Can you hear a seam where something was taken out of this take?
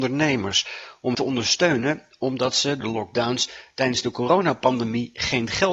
yes; 2 cuts; at 1.1 s, 2.8 s

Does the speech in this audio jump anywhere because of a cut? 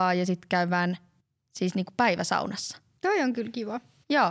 no; 0 cuts

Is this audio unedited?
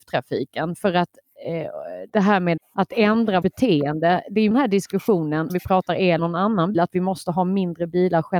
no; 7 cuts; at 2.1 s, 2.6 s, 3.4 s, 4.5 s, 5.5 s, 6.2 s, 6.7 s

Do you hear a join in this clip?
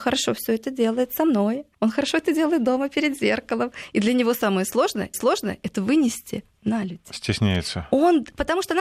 yes; 2 cuts; at 1.7 s, 5.1 s

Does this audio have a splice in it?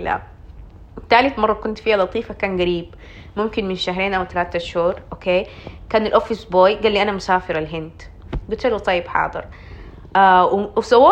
no; 0 cuts

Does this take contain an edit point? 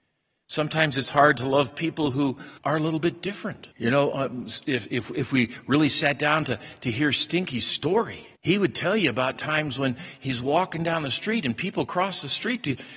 yes; 3 cuts; at 2.6 s, 3.7 s, 8.4 s

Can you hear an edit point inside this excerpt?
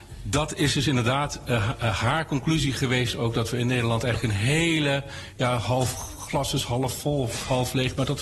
no; 0 cuts

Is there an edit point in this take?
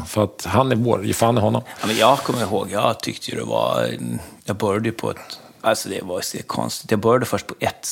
yes; 1 cut; at 5.5 s

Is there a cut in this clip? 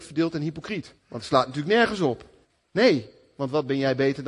yes; 2 cuts; at 1.0 s, 2.4 s

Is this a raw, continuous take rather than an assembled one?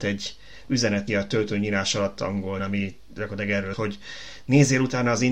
no; 3 cuts; at 1.1 s, 2.6 s, 3.7 s

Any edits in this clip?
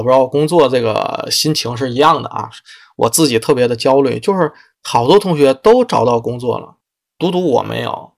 no; 0 cuts

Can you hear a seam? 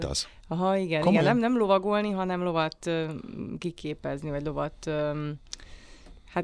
no; 0 cuts

